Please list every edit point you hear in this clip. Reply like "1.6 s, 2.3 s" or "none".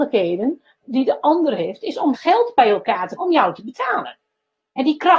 2.1 s, 3.2 s